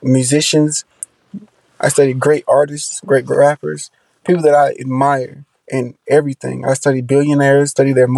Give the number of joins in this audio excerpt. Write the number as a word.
zero